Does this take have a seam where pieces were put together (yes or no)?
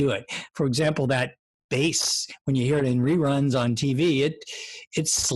no